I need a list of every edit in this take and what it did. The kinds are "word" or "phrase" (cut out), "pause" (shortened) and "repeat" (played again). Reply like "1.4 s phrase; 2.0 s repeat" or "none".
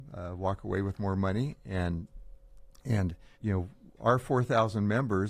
3.3 s pause